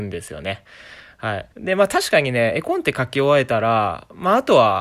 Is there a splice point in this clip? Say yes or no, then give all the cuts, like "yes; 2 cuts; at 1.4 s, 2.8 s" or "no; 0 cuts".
yes; 1 cut; at 1.5 s